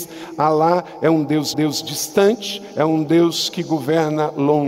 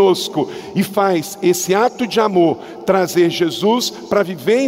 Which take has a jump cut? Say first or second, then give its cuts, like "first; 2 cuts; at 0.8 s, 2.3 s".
first; 1 cut; at 1.5 s